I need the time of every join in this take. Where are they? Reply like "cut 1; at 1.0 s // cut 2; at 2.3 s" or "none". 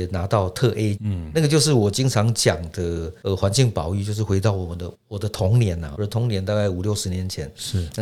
cut 1; at 1.0 s // cut 2; at 4.9 s // cut 3; at 5.9 s